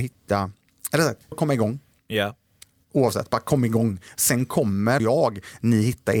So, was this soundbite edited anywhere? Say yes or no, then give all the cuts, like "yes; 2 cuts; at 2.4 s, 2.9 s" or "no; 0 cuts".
yes; 2 cuts; at 1.3 s, 5.0 s